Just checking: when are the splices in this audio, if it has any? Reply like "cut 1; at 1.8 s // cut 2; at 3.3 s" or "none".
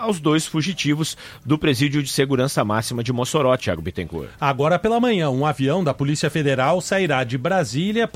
none